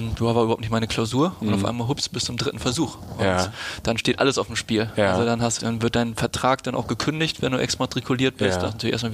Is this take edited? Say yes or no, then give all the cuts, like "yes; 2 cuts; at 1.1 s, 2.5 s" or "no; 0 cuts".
yes; 1 cut; at 5.6 s